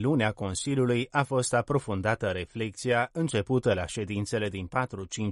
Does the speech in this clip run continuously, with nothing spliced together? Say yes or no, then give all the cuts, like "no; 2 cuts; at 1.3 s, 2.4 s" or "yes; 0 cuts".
yes; 0 cuts